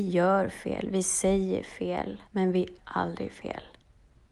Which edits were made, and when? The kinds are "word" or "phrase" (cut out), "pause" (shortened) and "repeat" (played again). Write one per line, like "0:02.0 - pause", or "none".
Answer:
0:02.3 - pause
0:02.8 - word